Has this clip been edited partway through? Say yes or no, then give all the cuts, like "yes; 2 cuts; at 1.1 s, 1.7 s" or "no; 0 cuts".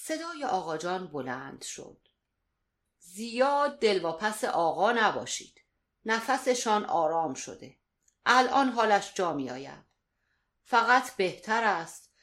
no; 0 cuts